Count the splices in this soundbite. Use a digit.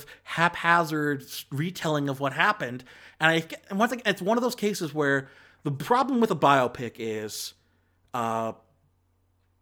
0